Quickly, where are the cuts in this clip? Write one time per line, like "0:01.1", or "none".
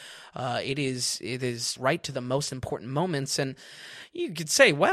0:01.8